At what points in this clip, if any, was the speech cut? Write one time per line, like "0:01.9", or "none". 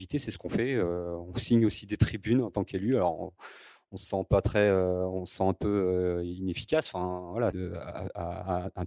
0:07.5